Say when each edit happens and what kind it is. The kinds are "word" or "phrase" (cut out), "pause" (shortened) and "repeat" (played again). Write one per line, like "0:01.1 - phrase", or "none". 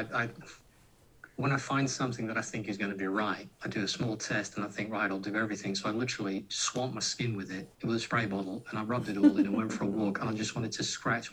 0:03.5 - pause
0:07.7 - pause